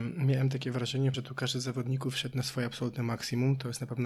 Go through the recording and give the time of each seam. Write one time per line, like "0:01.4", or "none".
0:01.1